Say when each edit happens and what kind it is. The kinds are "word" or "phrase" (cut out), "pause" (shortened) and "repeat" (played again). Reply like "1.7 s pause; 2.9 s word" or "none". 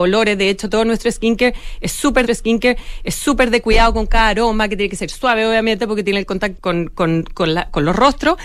2.3 s repeat; 6.6 s word